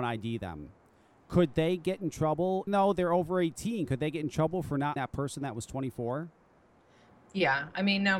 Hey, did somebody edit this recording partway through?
yes; 2 cuts; at 2.7 s, 5.0 s

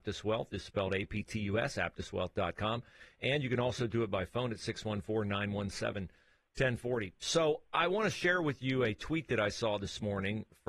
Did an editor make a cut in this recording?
no; 0 cuts

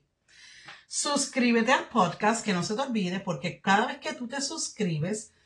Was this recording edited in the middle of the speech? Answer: no; 0 cuts

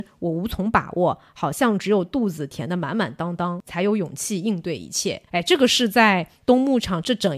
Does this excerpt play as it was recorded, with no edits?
no; 1 cut; at 5.3 s

